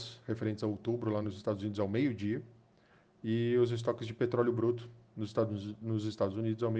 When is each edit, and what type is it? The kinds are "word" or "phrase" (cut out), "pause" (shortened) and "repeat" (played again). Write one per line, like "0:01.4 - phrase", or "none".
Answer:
none